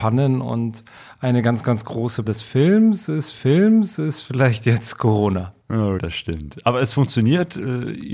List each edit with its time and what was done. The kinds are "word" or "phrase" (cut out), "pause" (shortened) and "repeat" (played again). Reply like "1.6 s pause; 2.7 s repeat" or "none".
2.3 s word; 3.3 s repeat; 6.0 s word